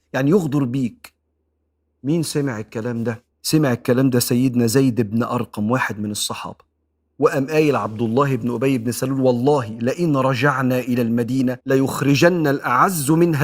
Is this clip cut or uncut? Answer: cut